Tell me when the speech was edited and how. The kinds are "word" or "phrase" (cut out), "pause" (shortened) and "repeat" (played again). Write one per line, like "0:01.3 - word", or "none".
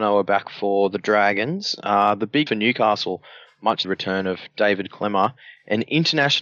0:02.5 - word
0:03.8 - word